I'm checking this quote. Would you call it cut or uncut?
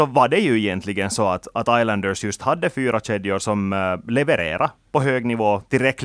uncut